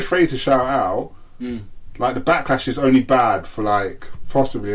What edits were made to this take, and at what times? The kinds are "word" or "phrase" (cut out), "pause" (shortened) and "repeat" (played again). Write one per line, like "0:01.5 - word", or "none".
none